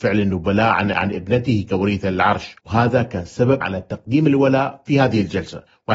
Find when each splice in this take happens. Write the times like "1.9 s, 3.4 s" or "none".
0.9 s, 2.6 s, 3.6 s